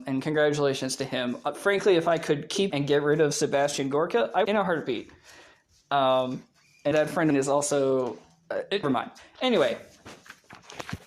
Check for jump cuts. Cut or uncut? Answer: cut